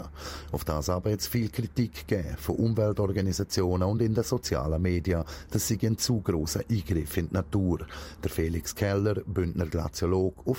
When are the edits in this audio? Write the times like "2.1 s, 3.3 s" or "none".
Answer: none